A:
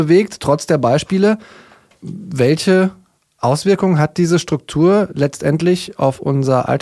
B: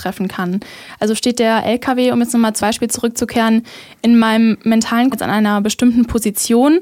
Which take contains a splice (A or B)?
B